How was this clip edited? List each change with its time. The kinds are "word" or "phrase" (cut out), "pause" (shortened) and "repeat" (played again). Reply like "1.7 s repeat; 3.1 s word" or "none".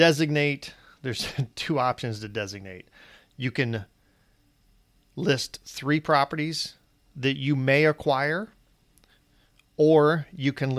none